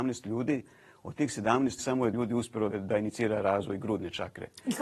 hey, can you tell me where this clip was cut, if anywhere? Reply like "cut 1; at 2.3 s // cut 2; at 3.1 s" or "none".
cut 1; at 1.8 s // cut 2; at 2.1 s // cut 3; at 2.7 s